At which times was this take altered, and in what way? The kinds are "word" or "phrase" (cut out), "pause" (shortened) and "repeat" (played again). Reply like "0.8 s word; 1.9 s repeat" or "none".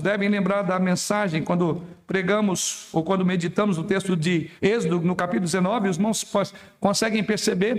4.6 s pause